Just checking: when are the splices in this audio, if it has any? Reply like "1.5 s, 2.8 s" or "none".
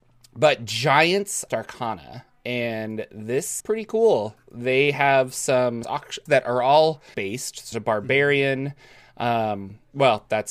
1.5 s, 3.6 s, 5.8 s, 6.3 s, 7.1 s, 7.7 s